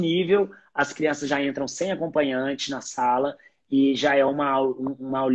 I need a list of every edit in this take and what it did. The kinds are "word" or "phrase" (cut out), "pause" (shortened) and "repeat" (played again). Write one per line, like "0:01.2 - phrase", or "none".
none